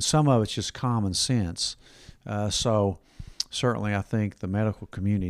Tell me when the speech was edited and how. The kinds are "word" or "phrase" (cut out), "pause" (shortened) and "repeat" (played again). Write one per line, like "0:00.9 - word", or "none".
none